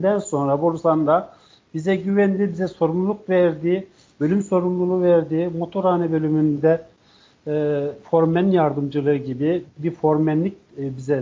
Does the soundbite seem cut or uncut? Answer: uncut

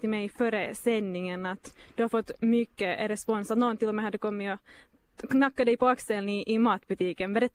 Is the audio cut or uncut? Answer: uncut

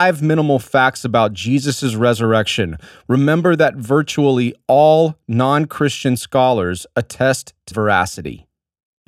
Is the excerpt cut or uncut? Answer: cut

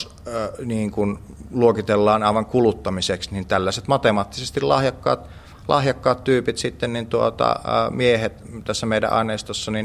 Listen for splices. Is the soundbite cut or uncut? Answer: uncut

